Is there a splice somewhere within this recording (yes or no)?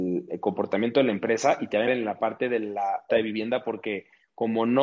yes